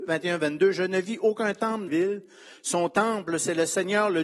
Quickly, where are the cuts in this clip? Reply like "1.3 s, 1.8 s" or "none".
1.9 s

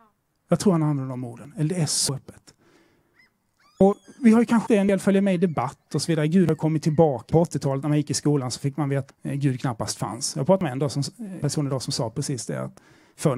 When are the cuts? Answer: 4.7 s, 7.3 s, 9.1 s, 11.4 s

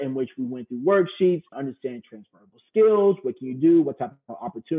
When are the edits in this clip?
1.5 s

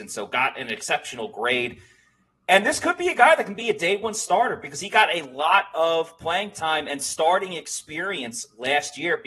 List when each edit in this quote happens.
none

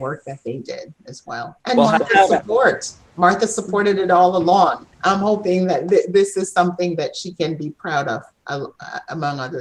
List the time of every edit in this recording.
1.6 s, 4.9 s

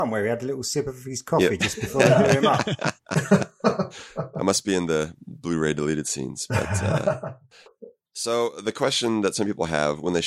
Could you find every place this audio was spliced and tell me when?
none

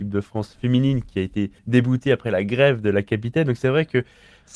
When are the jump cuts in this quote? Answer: 1.6 s

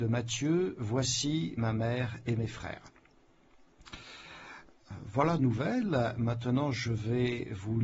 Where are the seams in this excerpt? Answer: 5.4 s

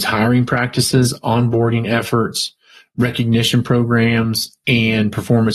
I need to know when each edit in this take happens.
none

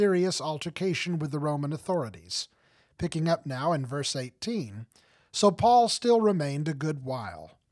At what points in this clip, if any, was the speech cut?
none

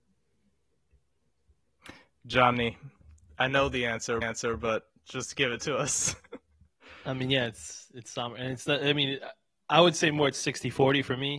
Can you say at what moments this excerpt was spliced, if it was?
4.2 s

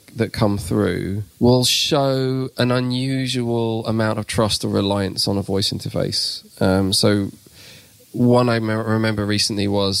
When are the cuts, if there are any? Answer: 1.3 s, 6.5 s

